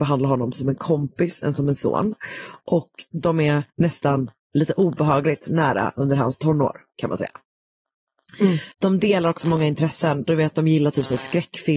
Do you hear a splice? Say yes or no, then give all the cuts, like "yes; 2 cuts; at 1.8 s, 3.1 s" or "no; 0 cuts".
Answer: yes; 2 cuts; at 3.7 s, 8.7 s